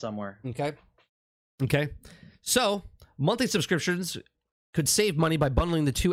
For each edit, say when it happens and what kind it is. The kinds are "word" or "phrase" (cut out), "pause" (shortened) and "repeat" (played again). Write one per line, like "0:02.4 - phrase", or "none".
none